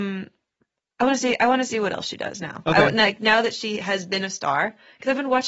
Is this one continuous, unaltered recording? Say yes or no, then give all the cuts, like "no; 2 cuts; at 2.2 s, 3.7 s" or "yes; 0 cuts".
yes; 0 cuts